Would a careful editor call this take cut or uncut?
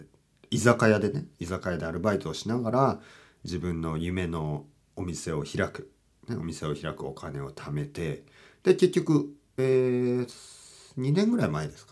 uncut